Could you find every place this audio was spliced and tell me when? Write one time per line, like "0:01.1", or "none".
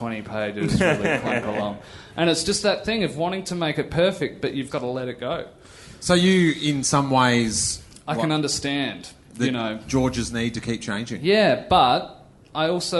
0:04.7